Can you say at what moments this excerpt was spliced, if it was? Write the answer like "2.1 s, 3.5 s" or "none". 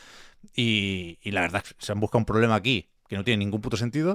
1.6 s, 3.0 s

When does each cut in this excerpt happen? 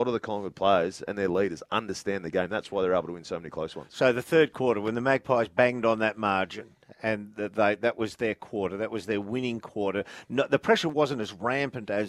none

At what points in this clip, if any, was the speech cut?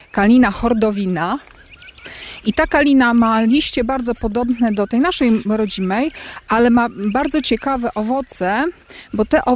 none

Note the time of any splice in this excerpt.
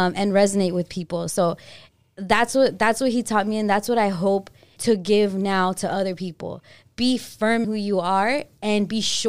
4.8 s, 7.6 s

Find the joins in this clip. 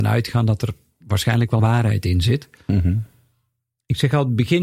1.6 s

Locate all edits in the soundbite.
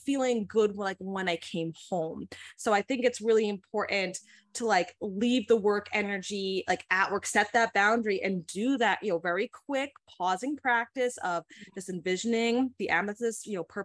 none

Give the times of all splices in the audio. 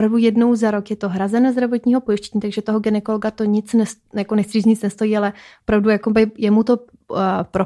none

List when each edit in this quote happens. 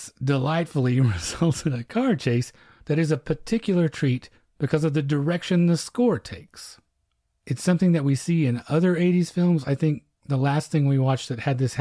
none

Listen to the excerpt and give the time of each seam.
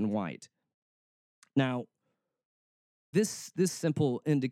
3.1 s, 3.5 s

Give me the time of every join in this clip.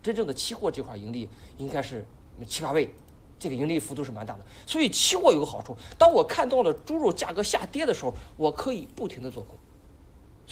none

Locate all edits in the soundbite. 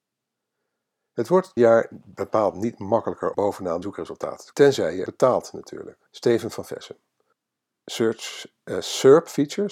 1.6 s, 3.3 s, 3.8 s, 4.5 s, 5.1 s, 6.1 s, 7.3 s

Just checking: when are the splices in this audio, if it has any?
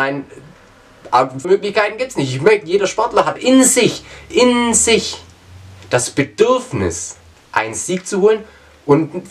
1.4 s, 3.4 s, 7.3 s

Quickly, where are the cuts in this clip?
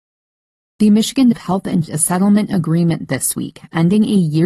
1.3 s, 1.9 s

